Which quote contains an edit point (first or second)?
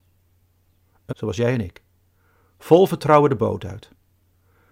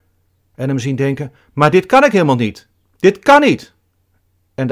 first